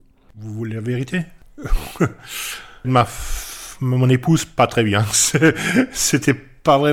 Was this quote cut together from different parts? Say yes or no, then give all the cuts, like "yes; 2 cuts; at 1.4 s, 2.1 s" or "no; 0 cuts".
yes; 1 cut; at 2.8 s